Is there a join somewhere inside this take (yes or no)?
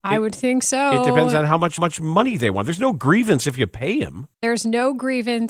yes